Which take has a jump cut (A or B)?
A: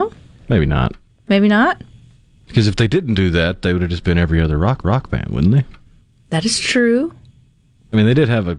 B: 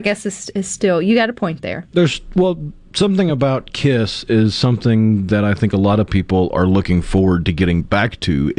A